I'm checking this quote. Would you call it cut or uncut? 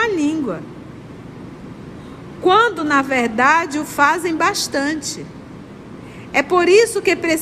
uncut